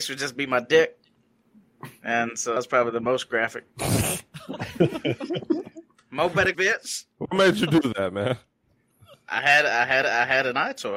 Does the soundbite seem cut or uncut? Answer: cut